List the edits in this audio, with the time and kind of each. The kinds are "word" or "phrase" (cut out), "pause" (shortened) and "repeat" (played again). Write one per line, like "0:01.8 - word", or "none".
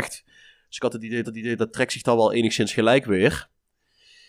0:01.2 - repeat